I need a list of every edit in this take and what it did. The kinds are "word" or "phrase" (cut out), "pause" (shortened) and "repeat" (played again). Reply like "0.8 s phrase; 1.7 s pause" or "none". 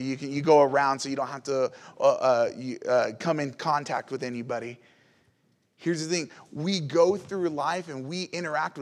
none